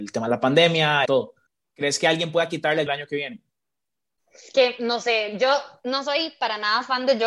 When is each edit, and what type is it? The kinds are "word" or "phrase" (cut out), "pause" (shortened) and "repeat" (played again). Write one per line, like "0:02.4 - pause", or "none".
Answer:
0:01.0 - phrase
0:02.9 - phrase